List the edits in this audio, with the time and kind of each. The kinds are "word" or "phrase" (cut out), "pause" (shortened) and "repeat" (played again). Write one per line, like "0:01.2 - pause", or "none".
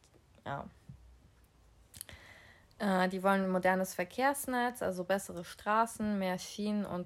none